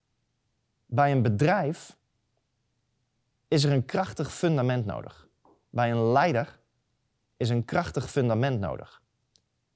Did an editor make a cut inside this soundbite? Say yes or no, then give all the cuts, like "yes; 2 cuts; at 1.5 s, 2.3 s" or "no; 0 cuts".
no; 0 cuts